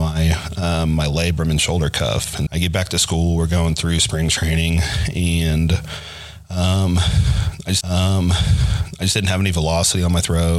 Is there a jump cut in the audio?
yes; 2 cuts; at 2.5 s, 7.8 s

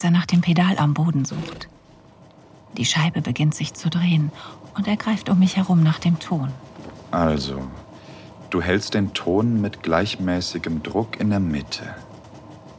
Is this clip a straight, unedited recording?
yes; 0 cuts

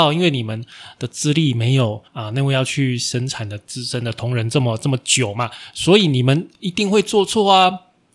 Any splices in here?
yes; 1 cut; at 2.1 s

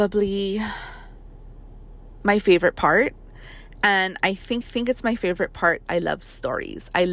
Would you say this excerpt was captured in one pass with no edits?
no; 2 cuts; at 4.6 s, 5.9 s

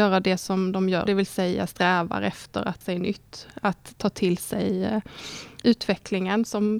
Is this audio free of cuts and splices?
no; 3 cuts; at 1.1 s, 2.8 s, 5.6 s

